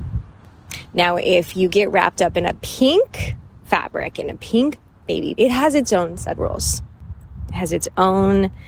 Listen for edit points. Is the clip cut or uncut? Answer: cut